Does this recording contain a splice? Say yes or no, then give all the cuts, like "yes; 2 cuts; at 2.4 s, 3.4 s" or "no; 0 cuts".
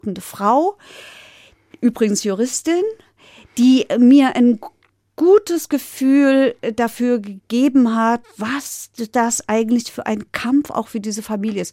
no; 0 cuts